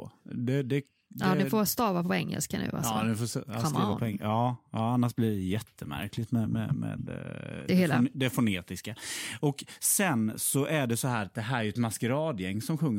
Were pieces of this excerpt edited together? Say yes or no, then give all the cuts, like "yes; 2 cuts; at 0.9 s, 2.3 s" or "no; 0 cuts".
no; 0 cuts